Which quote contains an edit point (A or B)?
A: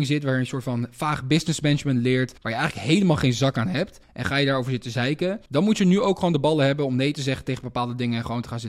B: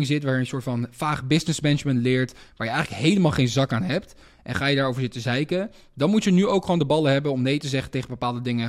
A